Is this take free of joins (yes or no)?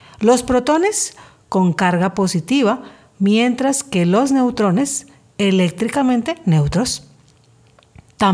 yes